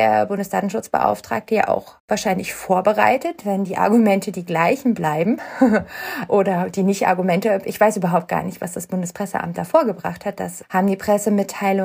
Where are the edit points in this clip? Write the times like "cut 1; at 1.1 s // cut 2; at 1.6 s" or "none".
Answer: cut 1; at 2.0 s